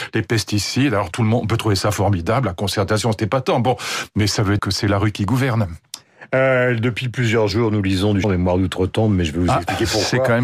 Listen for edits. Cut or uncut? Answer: cut